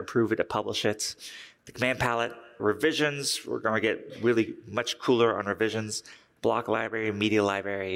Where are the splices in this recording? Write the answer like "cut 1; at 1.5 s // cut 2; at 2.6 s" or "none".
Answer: none